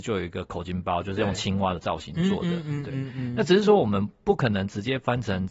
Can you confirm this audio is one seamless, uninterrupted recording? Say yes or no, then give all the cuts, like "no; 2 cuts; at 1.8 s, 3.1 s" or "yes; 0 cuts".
yes; 0 cuts